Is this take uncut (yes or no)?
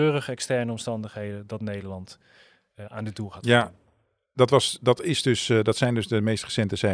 yes